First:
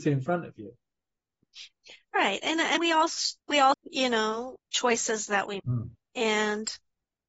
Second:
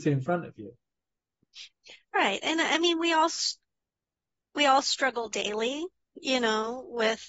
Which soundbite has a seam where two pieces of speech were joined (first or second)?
first